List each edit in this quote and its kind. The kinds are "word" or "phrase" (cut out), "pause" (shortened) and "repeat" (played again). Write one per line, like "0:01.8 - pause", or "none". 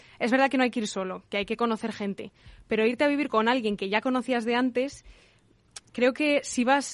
none